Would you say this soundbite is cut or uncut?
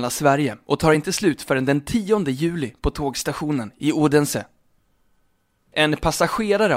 uncut